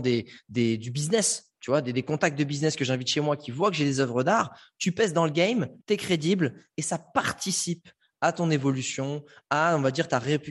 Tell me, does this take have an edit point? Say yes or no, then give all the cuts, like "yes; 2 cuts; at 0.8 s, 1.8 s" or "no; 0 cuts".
yes; 1 cut; at 5.8 s